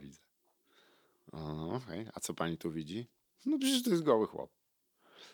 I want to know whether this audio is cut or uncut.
uncut